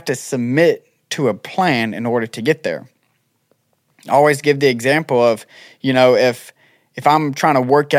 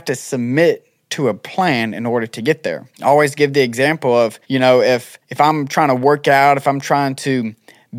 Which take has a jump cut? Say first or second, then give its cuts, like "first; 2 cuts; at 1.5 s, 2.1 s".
second; 3 cuts; at 2.9 s, 4.4 s, 5.2 s